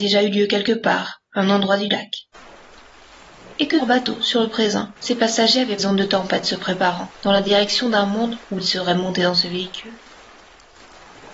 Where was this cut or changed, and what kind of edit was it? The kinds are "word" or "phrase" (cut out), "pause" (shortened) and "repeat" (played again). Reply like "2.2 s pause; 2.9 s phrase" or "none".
3.8 s word; 5.0 s pause; 5.8 s phrase; 7.1 s pause; 8.4 s pause